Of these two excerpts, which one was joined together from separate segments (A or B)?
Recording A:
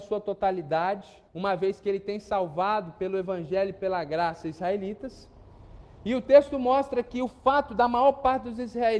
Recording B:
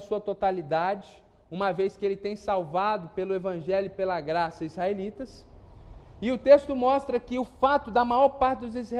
A